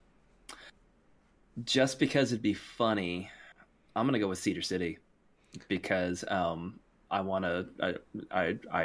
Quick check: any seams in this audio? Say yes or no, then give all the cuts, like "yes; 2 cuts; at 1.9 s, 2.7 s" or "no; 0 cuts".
no; 0 cuts